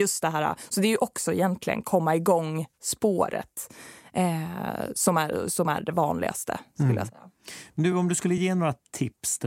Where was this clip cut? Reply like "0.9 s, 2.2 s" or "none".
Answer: none